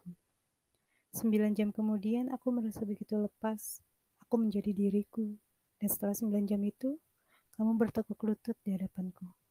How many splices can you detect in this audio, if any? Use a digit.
0